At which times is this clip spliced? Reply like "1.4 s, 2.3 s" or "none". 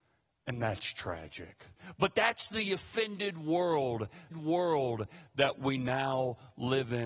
4.3 s